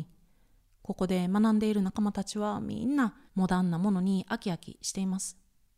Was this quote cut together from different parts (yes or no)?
yes